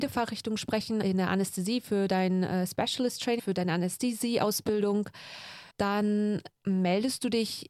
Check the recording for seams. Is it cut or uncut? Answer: cut